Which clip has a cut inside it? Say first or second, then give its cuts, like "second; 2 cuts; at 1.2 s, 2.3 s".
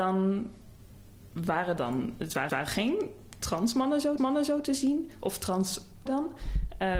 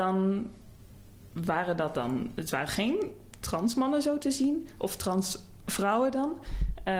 first; 4 cuts; at 1.8 s, 2.5 s, 4.2 s, 6.1 s